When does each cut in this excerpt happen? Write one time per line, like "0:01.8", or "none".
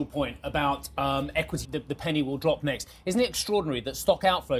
0:01.6